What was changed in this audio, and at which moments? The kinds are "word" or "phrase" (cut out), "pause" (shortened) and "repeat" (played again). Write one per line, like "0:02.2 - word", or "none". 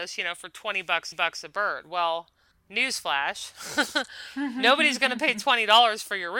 0:01.1 - repeat
0:02.5 - pause